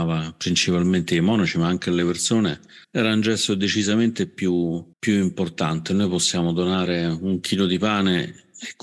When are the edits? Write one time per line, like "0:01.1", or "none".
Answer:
0:02.8
0:04.9

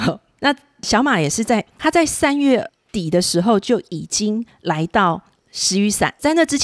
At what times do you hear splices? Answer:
none

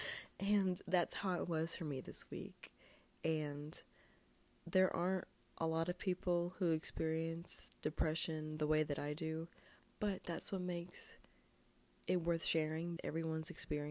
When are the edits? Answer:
0:13.0

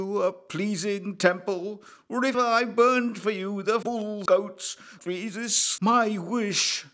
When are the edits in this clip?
0:02.3
0:03.8
0:04.3
0:05.0
0:05.8

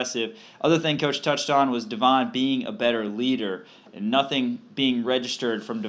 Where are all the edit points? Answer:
none

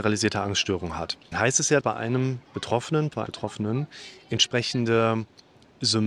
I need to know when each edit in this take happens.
0:01.3
0:01.8
0:03.3

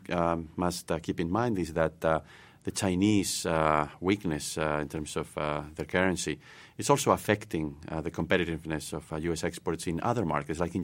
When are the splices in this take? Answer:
none

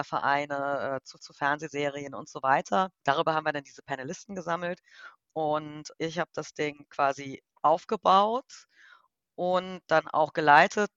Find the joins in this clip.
0:01.2
0:03.0
0:05.9
0:07.5

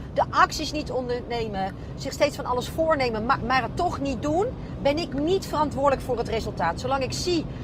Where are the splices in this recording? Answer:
none

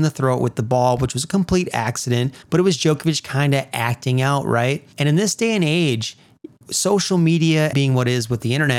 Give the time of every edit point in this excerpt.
0:02.4
0:04.9
0:07.7

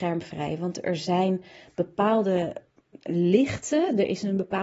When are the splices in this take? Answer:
none

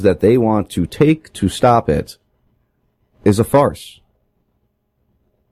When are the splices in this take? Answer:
none

